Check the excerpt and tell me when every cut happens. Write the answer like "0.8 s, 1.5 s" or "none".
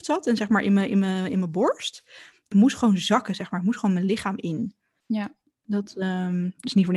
2.5 s